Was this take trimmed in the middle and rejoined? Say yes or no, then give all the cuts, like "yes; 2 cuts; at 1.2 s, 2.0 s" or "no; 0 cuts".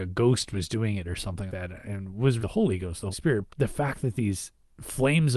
yes; 4 cuts; at 1.5 s, 2.4 s, 3.1 s, 3.5 s